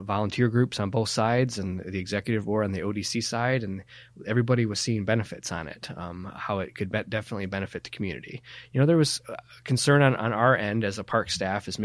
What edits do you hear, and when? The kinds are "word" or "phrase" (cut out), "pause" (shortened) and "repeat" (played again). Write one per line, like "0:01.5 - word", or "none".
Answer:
none